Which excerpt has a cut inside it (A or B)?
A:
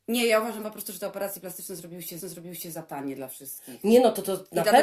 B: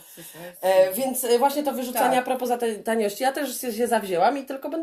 A